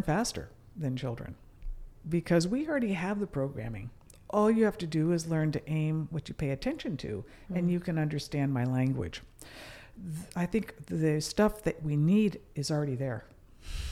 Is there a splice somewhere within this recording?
no; 0 cuts

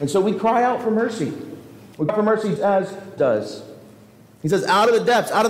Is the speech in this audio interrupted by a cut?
yes; 3 cuts; at 2.1 s, 2.6 s, 3.2 s

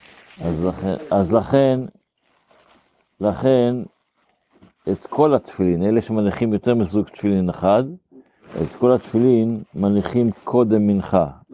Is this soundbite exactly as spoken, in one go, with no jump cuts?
yes; 0 cuts

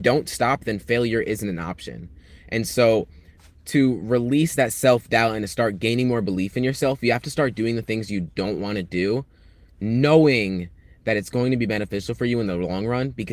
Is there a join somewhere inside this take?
no; 0 cuts

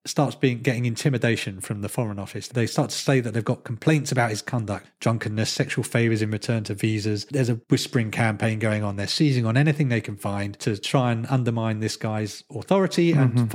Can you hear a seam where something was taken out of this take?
no; 0 cuts

